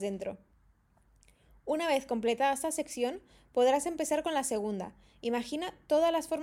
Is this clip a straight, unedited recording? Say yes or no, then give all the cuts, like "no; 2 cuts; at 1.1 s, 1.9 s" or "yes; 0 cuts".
yes; 0 cuts